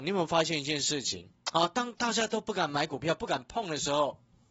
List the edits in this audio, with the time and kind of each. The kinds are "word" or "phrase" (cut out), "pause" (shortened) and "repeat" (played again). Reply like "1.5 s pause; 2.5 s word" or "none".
1.4 s pause